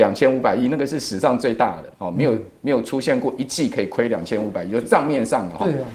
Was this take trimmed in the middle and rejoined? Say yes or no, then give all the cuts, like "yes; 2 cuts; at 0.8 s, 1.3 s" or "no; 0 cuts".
yes; 1 cut; at 1.9 s